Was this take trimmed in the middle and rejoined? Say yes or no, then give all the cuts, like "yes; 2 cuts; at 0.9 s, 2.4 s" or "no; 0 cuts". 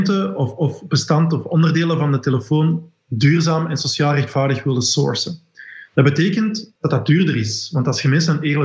yes; 1 cut; at 5.9 s